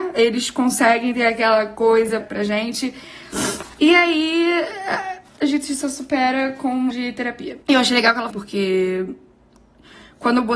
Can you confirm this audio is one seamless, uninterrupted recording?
no; 5 cuts; at 2.2 s, 5.3 s, 6.9 s, 7.6 s, 8.3 s

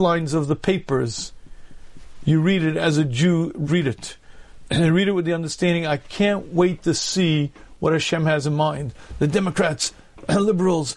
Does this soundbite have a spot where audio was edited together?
yes; 1 cut; at 3.7 s

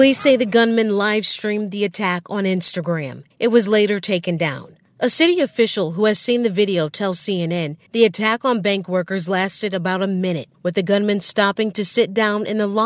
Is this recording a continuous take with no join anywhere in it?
no; 3 cuts; at 3.3 s, 7.9 s, 10.5 s

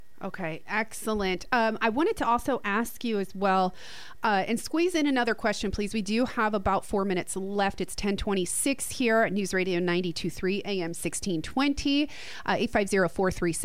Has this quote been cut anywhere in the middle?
no; 0 cuts

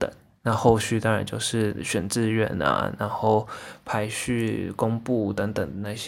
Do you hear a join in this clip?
no; 0 cuts

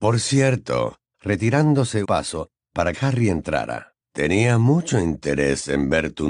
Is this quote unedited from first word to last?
no; 4 cuts; at 1.1 s, 2.0 s, 2.9 s, 4.0 s

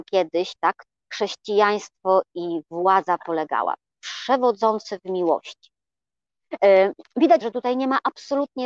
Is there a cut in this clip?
yes; 3 cuts; at 0.9 s, 3.2 s, 7.4 s

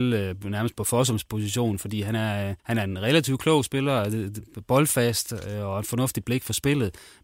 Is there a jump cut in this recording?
yes; 1 cut; at 2.6 s

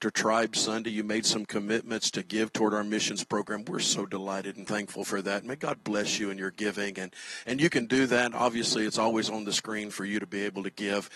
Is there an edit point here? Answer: no; 0 cuts

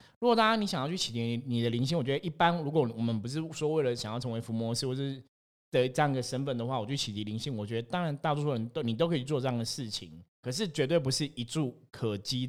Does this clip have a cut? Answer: yes; 1 cut; at 10.3 s

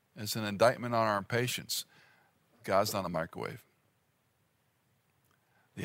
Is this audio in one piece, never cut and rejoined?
yes; 0 cuts

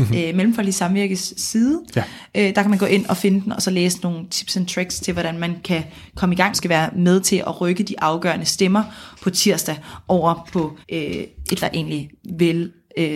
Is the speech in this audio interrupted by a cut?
yes; 3 cuts; at 6.5 s, 10.8 s, 11.6 s

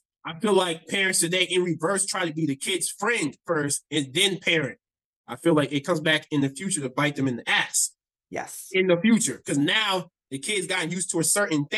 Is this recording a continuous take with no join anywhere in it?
yes; 0 cuts

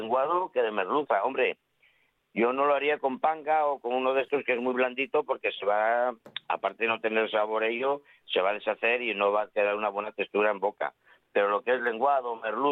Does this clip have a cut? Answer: no; 0 cuts

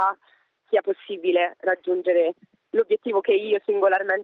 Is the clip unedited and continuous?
yes; 0 cuts

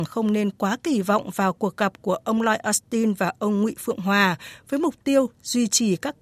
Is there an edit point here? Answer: no; 0 cuts

